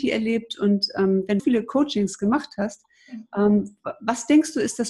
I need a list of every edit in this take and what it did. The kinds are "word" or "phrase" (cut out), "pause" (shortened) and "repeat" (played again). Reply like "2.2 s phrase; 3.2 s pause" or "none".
1.4 s phrase